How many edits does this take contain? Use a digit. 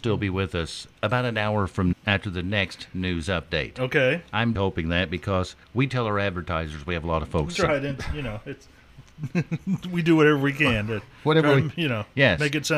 4